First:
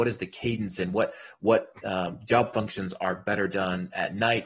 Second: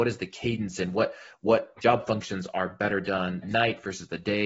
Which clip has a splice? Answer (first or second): second